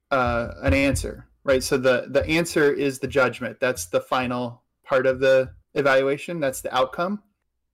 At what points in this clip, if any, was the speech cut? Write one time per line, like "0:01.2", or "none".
0:05.6